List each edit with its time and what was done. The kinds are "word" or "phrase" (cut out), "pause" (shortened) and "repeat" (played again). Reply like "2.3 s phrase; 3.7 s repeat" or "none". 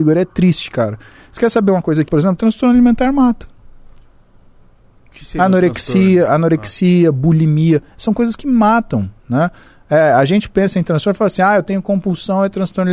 2.1 s word